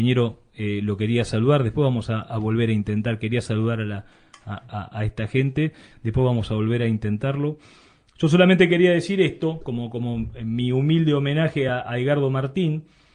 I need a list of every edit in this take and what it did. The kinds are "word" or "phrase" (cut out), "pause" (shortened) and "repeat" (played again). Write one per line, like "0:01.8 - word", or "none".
none